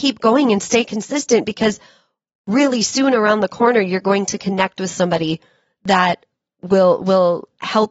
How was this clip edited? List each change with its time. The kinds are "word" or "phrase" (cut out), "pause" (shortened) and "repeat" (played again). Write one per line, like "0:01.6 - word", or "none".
none

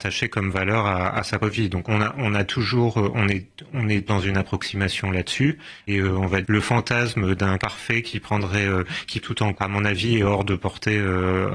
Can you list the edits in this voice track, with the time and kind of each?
0:01.4 - word
0:01.8 - word
0:04.1 - word
0:05.9 - word
0:06.4 - word
0:07.6 - word
0:09.2 - word
0:09.5 - word

